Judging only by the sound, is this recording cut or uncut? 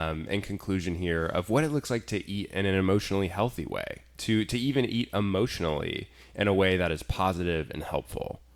uncut